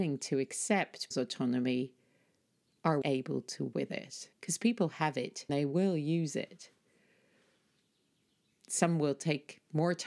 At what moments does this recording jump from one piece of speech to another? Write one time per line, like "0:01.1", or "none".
0:01.1
0:03.0
0:03.7
0:04.3
0:05.5